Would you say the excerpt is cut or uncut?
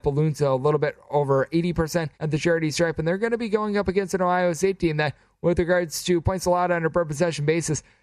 cut